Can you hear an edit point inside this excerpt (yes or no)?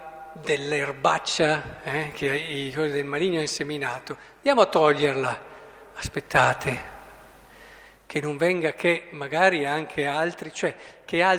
no